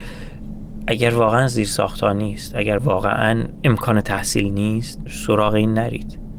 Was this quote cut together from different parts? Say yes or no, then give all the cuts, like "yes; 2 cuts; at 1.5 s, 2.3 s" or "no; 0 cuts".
no; 0 cuts